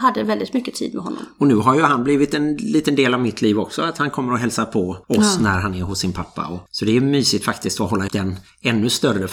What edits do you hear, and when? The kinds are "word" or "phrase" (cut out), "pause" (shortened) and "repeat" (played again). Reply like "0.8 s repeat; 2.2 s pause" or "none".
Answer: 5.0 s pause; 6.7 s pause; 8.1 s word